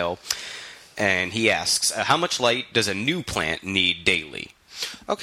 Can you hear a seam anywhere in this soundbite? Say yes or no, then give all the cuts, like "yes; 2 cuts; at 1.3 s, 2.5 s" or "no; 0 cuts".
no; 0 cuts